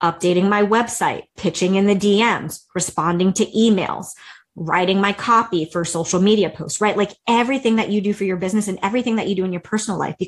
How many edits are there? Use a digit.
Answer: 1